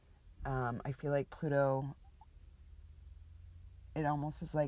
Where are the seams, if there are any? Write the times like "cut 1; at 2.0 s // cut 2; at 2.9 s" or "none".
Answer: none

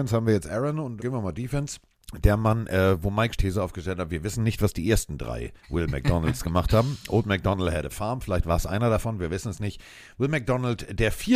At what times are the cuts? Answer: cut 1; at 1.0 s // cut 2; at 1.9 s // cut 3; at 3.4 s // cut 4; at 5.6 s

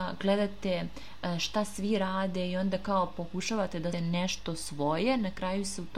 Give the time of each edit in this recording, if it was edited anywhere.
cut 1; at 3.9 s

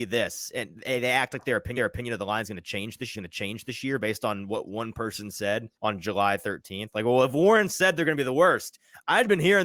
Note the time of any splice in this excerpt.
cut 1; at 1.8 s // cut 2; at 3.1 s // cut 3; at 5.8 s

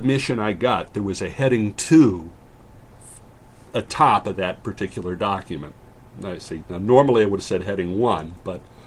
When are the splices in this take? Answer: cut 1; at 3.9 s

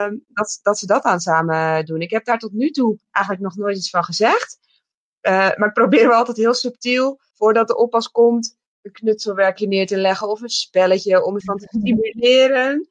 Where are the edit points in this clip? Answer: cut 1; at 3.0 s // cut 2; at 7.3 s // cut 3; at 11.4 s

